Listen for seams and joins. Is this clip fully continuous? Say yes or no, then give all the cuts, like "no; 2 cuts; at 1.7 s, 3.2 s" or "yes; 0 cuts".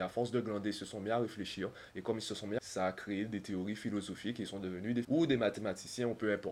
no; 2 cuts; at 2.6 s, 5.0 s